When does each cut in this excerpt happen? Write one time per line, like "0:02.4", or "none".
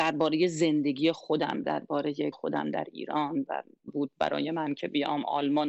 0:01.6
0:02.3
0:03.9